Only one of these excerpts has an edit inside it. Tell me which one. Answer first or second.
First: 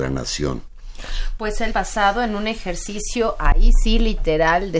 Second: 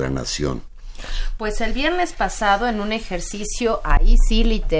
first